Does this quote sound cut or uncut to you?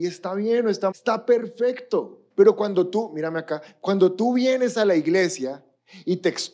cut